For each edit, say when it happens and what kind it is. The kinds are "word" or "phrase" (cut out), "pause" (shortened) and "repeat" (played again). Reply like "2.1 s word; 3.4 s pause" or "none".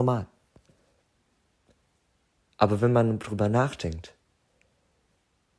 none